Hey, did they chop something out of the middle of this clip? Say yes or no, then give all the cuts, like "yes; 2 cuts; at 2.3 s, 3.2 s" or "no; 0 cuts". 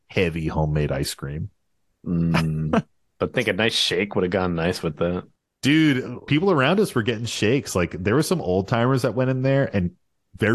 no; 0 cuts